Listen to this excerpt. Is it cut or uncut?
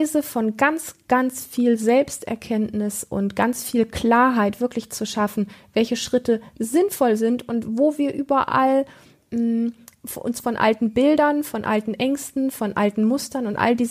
uncut